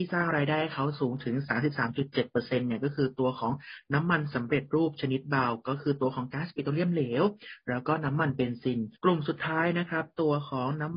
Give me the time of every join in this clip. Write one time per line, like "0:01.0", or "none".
0:09.0